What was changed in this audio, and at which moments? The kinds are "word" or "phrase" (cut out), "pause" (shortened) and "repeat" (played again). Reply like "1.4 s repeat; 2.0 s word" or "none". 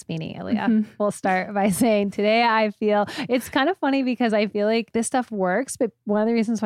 none